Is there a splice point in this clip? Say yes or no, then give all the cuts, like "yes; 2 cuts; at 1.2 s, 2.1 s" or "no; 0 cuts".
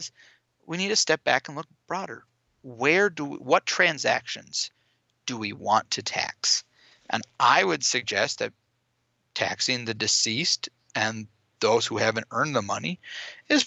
no; 0 cuts